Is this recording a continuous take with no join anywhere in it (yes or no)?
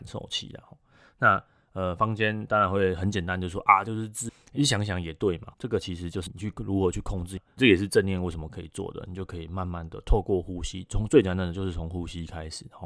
no